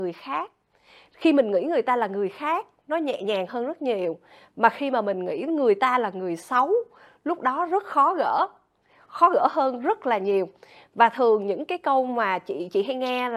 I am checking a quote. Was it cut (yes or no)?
no